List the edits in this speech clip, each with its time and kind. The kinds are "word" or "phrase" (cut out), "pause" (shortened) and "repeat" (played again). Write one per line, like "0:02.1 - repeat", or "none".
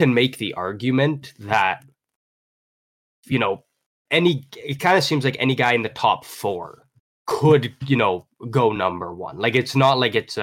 none